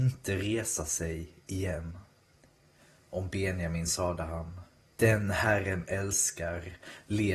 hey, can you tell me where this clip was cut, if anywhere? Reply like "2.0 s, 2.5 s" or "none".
none